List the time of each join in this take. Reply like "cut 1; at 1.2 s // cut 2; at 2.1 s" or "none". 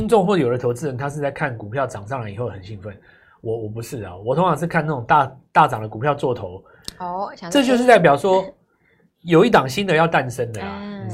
none